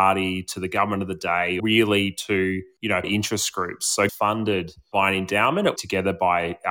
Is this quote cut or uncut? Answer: cut